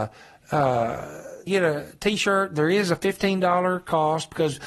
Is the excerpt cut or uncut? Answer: cut